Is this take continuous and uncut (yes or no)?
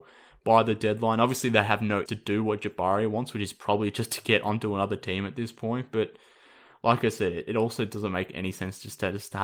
no